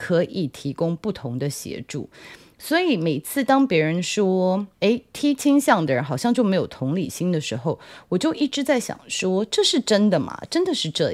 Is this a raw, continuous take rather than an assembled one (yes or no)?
yes